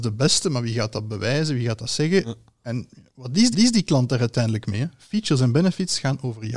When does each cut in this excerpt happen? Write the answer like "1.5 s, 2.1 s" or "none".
3.5 s